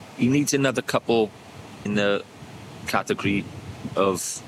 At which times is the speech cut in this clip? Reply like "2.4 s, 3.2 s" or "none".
1.9 s